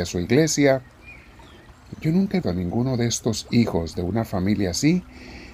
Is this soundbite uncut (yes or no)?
no